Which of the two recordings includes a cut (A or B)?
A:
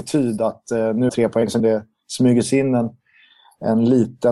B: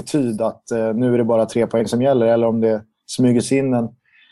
A